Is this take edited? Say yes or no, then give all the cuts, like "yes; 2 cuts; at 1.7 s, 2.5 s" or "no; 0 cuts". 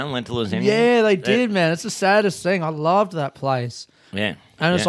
no; 0 cuts